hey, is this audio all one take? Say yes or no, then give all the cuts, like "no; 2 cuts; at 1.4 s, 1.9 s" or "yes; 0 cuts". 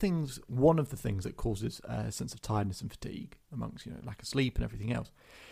yes; 0 cuts